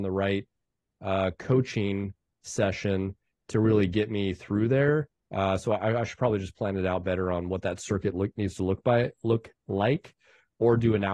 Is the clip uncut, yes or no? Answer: yes